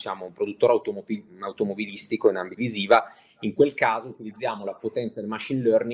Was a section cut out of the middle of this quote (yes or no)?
yes